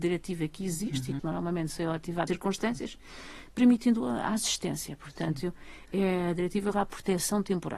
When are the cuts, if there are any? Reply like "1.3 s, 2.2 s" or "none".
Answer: 1.2 s, 2.3 s, 4.0 s, 6.7 s